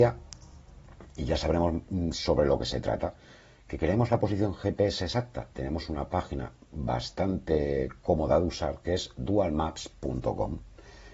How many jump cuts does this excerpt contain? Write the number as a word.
one